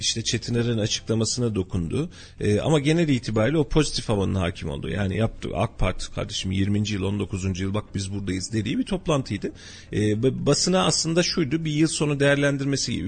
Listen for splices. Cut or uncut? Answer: uncut